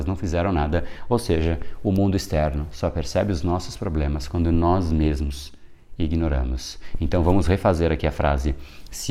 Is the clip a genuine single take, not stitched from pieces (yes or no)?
yes